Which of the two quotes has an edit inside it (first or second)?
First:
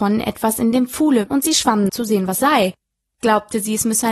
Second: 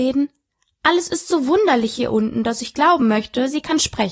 first